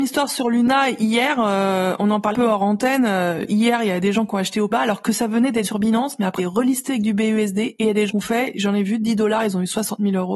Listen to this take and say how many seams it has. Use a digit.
5